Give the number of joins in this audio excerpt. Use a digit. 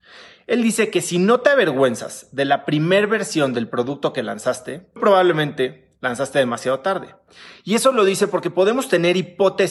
1